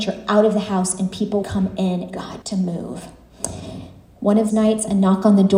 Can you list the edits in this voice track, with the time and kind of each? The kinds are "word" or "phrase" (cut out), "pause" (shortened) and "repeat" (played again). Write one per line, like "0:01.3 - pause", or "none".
0:01.4 - word
0:02.1 - word
0:02.4 - word
0:04.5 - word